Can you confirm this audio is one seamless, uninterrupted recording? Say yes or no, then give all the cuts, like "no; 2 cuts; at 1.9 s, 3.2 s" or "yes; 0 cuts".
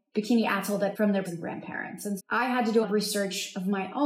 no; 4 cuts; at 0.9 s, 1.3 s, 2.2 s, 2.8 s